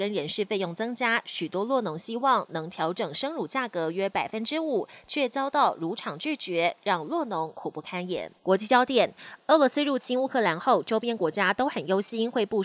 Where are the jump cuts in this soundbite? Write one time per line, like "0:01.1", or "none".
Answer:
0:08.4